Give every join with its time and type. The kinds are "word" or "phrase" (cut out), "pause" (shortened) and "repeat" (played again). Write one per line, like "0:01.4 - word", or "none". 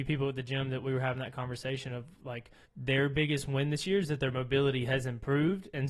0:02.7 - pause